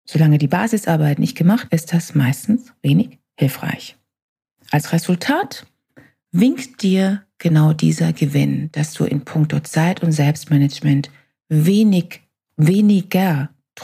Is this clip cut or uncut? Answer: cut